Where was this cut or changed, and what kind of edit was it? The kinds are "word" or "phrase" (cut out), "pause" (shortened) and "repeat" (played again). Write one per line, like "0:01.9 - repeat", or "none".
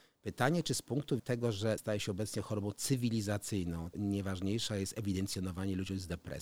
0:01.2 - word
0:01.8 - word
0:03.9 - word